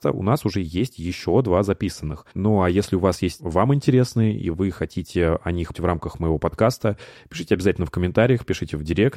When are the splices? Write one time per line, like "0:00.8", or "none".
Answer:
0:02.3
0:03.4
0:05.7